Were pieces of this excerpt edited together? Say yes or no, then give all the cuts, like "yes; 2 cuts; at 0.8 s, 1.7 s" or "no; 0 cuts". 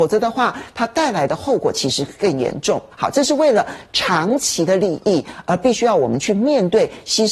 yes; 1 cut; at 2.9 s